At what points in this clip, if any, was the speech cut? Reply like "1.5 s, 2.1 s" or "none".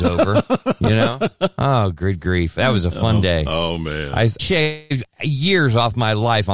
4.4 s